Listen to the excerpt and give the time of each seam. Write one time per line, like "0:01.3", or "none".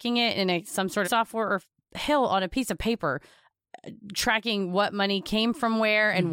0:01.0